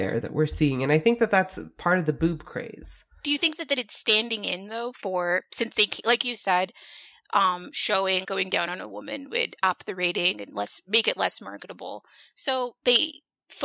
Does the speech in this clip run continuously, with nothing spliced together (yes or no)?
no